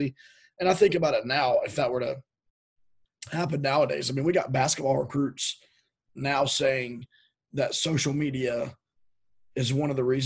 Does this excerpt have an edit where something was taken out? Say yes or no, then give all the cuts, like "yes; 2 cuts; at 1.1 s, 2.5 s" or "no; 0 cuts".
no; 0 cuts